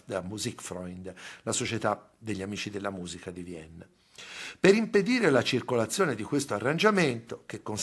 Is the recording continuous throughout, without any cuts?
yes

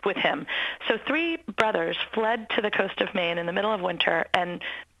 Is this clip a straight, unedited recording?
yes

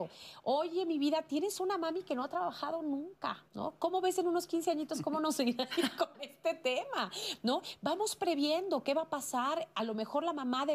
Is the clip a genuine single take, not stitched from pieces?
no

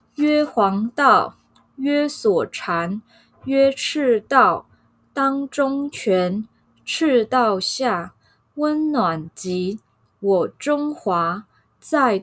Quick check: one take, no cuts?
yes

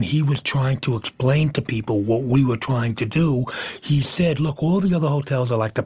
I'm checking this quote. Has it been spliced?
no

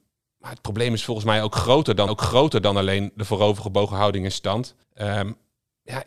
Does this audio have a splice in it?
yes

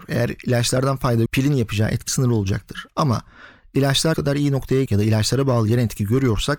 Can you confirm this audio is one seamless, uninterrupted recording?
no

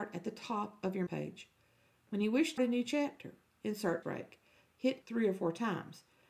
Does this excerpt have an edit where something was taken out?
yes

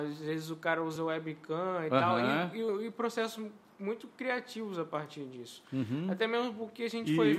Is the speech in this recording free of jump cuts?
yes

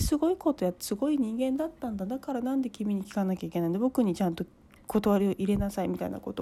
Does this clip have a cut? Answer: no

